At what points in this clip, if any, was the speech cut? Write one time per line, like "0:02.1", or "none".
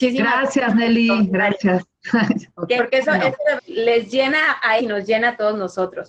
0:02.8
0:03.6
0:04.8